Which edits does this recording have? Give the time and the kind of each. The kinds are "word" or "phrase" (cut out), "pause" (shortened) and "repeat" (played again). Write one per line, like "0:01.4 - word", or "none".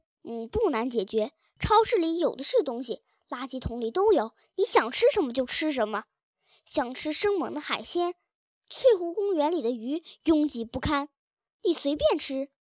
none